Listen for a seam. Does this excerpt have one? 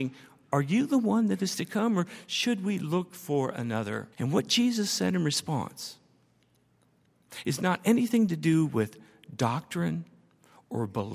yes; 1 cut; at 4.1 s

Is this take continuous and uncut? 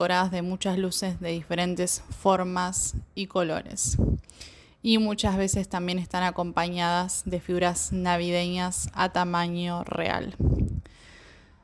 yes; 0 cuts

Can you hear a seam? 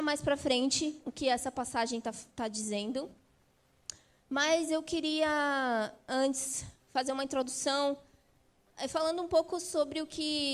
no; 0 cuts

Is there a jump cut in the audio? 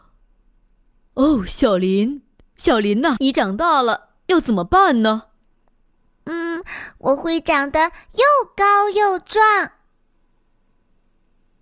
yes; 1 cut; at 3.2 s

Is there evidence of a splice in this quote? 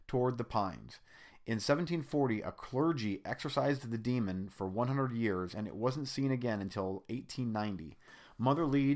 no; 0 cuts

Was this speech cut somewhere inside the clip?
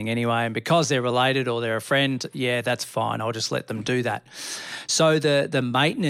no; 0 cuts

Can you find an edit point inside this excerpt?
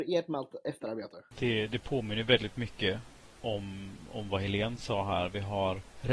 no; 0 cuts

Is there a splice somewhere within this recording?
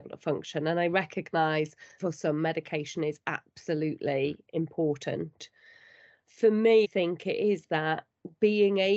yes; 2 cuts; at 2.0 s, 6.8 s

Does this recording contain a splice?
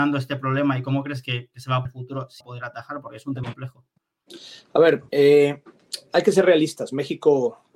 yes; 4 cuts; at 1.9 s, 2.4 s, 3.4 s, 5.1 s

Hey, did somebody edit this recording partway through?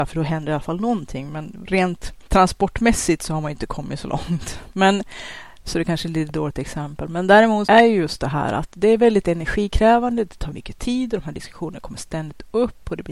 yes; 3 cuts; at 2.3 s, 7.7 s, 10.5 s

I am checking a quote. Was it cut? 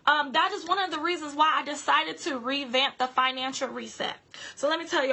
no; 0 cuts

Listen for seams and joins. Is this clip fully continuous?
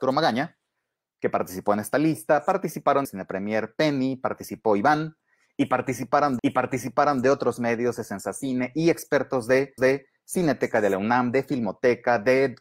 no; 3 cuts; at 3.0 s, 6.4 s, 9.8 s

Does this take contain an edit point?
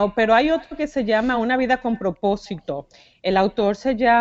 no; 0 cuts

